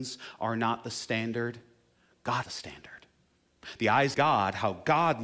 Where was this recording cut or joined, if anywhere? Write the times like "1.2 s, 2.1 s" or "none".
2.4 s, 4.1 s